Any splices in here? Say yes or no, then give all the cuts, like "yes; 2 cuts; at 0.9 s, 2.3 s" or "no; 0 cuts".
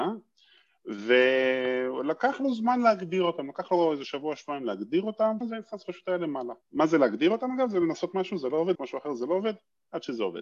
yes; 3 cuts; at 5.4 s, 6.6 s, 8.7 s